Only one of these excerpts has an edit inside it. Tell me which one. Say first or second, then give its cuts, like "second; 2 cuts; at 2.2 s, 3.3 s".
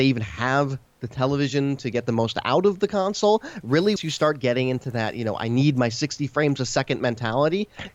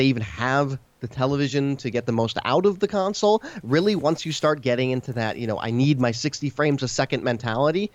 first; 1 cut; at 4.0 s